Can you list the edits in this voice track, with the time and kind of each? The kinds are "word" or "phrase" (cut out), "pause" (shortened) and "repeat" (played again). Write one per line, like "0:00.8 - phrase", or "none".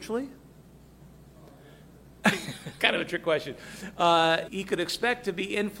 0:02.8 - phrase
0:04.5 - word